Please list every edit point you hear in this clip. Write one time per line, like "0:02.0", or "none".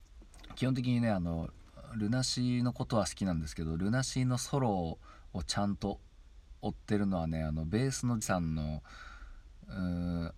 0:08.2